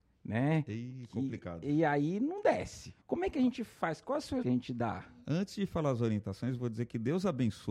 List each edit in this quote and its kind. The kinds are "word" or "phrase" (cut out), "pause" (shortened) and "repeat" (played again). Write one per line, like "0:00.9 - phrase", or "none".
0:03.0 - pause
0:03.3 - phrase
0:04.4 - phrase